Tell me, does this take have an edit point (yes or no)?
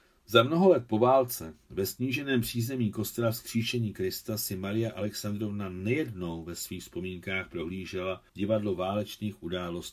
yes